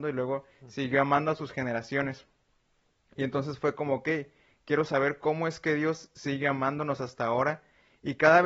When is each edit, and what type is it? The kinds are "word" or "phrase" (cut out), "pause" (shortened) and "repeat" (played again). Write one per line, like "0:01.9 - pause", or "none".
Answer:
none